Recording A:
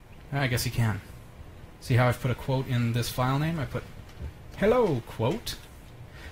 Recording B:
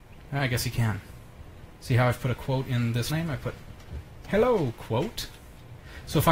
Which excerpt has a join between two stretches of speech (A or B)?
B